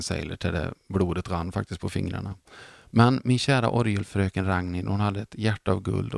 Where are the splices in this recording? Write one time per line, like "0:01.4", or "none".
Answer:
none

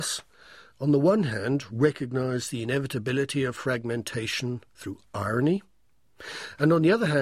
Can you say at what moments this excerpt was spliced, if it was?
none

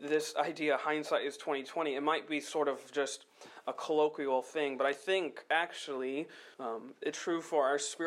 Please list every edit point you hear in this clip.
0:06.5
0:07.1

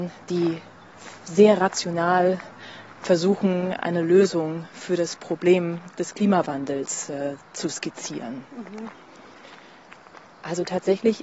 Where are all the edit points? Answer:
none

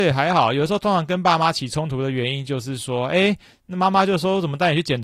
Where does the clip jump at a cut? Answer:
none

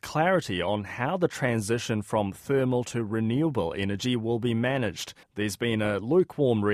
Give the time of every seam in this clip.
0:05.2

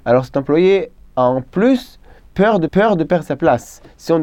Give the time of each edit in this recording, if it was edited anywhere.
0:02.7

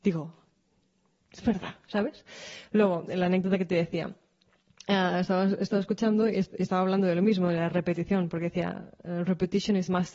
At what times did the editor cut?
none

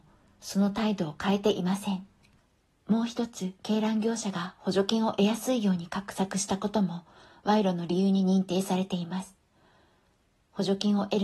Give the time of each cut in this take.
0:02.4
0:03.6

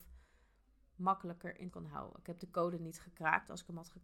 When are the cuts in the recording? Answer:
0:01.7

